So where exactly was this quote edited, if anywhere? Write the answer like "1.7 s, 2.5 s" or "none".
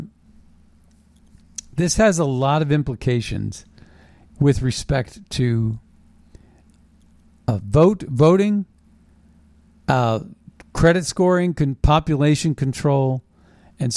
none